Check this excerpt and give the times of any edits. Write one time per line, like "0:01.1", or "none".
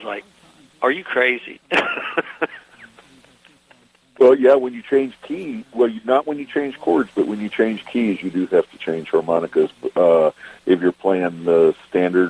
none